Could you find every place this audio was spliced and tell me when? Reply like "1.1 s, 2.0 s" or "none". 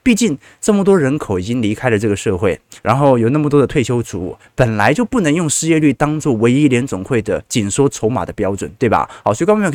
2.8 s